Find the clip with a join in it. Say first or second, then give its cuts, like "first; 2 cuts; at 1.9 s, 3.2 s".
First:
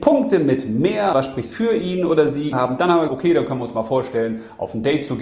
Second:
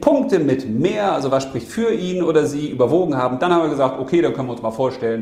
first; 3 cuts; at 1.1 s, 2.5 s, 3.1 s